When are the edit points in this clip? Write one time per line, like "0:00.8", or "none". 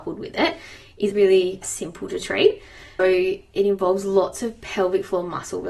0:01.1
0:01.6
0:03.0